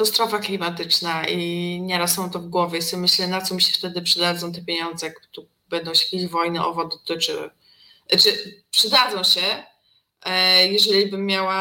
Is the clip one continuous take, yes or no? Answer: yes